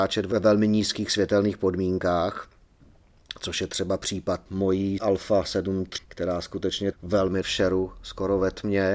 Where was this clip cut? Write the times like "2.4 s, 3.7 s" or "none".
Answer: 5.0 s, 6.0 s, 6.9 s, 7.4 s